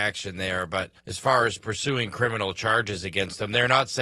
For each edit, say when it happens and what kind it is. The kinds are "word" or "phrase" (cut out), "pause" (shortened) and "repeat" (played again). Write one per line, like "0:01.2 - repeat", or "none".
0:01.0 - pause